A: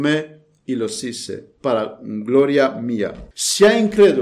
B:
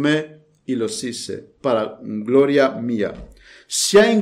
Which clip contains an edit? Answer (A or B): A